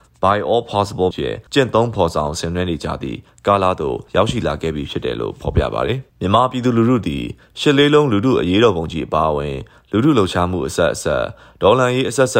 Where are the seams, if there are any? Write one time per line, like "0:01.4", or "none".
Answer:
0:01.1
0:01.5
0:04.1
0:06.1